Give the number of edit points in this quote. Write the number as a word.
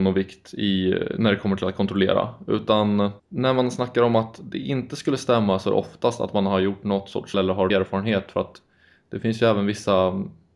three